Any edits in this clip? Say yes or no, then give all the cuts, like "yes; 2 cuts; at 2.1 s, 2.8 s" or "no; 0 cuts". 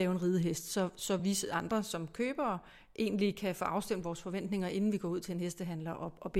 no; 0 cuts